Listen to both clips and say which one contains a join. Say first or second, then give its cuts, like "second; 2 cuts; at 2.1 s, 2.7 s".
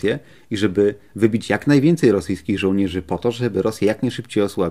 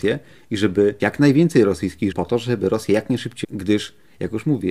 second; 3 cuts; at 1.0 s, 2.1 s, 3.4 s